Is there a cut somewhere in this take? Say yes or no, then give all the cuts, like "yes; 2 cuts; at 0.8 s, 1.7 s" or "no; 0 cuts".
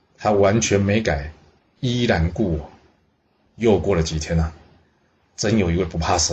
no; 0 cuts